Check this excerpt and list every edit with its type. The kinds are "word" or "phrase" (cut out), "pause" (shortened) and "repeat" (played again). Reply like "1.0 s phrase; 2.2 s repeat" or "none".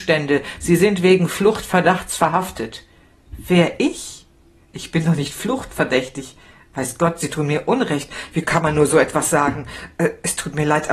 none